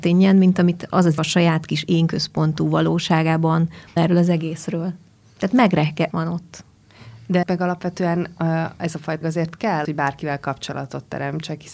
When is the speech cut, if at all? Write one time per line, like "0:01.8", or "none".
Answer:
0:01.2
0:04.0
0:06.1
0:07.4
0:09.2
0:09.8